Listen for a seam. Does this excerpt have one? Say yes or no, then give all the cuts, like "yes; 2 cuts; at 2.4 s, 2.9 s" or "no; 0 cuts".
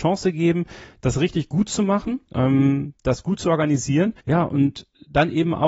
yes; 2 cuts; at 2.2 s, 4.2 s